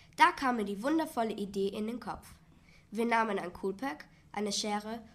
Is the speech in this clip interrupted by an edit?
no; 0 cuts

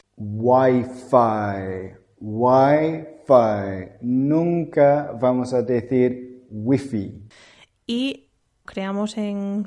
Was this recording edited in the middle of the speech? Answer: yes; 1 cut; at 8.7 s

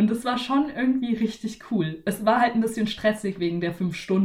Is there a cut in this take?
no; 0 cuts

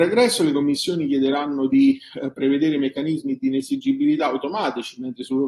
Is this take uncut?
yes; 0 cuts

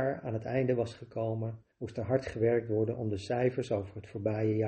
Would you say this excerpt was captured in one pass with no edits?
no; 1 cut; at 1.7 s

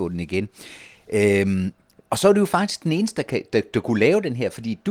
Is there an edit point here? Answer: no; 0 cuts

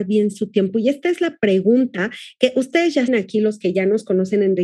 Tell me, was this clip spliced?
yes; 1 cut; at 3.1 s

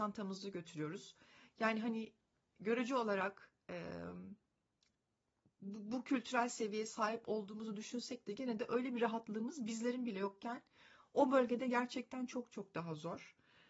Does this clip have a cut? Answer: no; 0 cuts

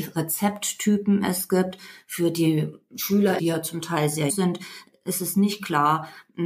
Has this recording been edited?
yes; 2 cuts; at 3.4 s, 4.3 s

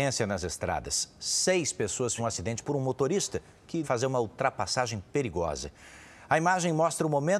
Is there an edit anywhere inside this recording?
yes; 3 cuts; at 2.2 s, 2.6 s, 3.8 s

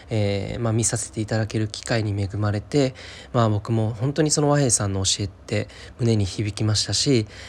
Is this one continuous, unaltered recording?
yes; 0 cuts

